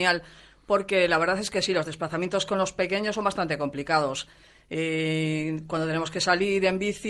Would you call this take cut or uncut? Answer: uncut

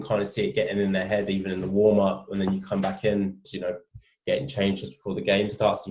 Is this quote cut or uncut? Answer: cut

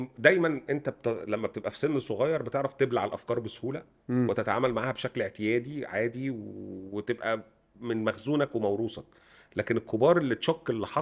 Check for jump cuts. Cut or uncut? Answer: uncut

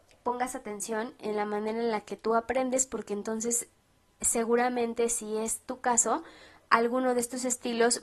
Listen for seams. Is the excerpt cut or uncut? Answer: uncut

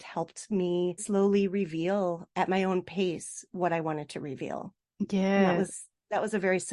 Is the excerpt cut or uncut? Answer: cut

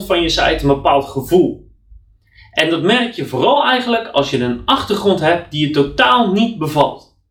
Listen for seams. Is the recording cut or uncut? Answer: uncut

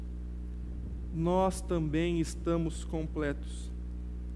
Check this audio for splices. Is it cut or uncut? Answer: uncut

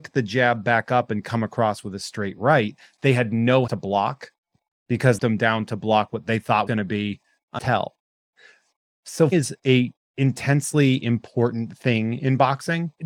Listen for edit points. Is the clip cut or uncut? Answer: cut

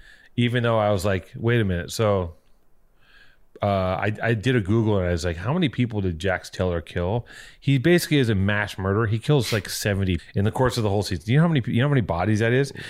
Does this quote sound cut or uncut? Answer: cut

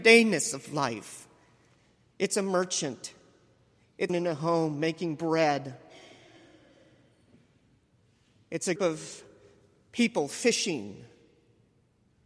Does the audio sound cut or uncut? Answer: cut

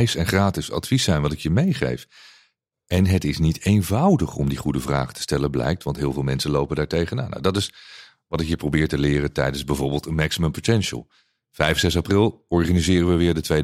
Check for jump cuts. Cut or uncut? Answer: uncut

